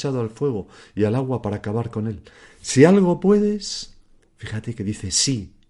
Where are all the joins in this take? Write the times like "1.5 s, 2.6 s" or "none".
none